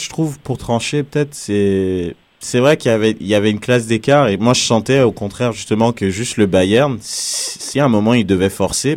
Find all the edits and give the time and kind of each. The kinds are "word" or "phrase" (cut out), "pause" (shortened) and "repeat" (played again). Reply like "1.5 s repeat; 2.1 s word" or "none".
2.2 s pause